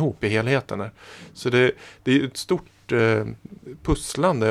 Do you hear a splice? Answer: no; 0 cuts

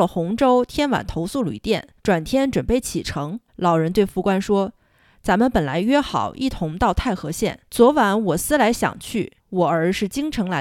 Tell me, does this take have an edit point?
yes; 4 cuts; at 2.0 s, 3.5 s, 7.7 s, 9.4 s

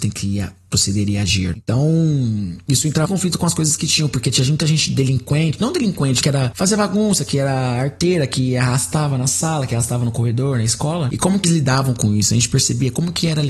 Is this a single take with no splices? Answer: no; 3 cuts; at 3.0 s, 6.2 s, 11.4 s

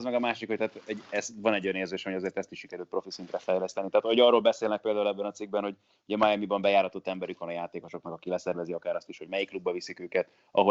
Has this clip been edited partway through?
no; 0 cuts

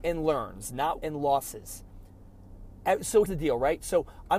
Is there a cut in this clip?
yes; 2 cuts; at 1.0 s, 3.3 s

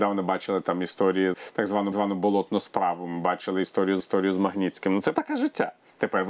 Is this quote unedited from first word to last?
no; 4 cuts; at 1.3 s, 1.9 s, 4.0 s, 5.1 s

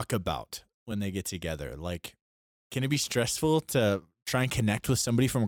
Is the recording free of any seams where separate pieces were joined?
yes; 0 cuts

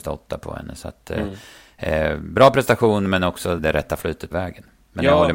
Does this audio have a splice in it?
yes; 2 cuts; at 3.6 s, 4.3 s

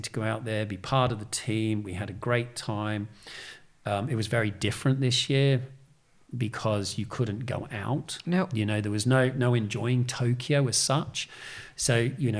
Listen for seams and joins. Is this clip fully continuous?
yes; 0 cuts

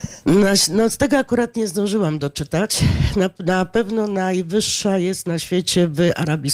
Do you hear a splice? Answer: no; 0 cuts

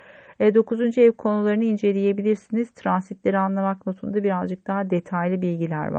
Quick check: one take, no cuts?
yes; 0 cuts

